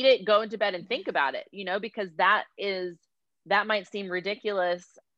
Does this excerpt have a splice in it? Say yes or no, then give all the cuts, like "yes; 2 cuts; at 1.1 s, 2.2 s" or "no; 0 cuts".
no; 0 cuts